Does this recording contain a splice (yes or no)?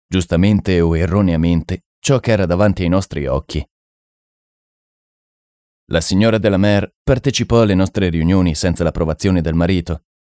no